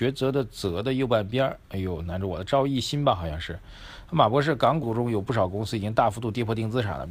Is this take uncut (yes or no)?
no